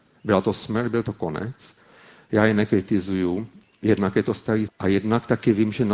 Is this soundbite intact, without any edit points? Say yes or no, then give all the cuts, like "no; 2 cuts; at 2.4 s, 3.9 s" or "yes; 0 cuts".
no; 1 cut; at 4.7 s